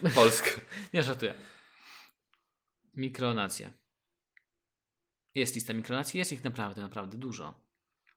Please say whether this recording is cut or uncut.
uncut